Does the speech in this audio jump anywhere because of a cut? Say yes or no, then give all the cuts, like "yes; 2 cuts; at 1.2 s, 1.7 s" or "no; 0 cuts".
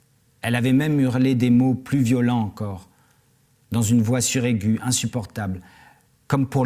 no; 0 cuts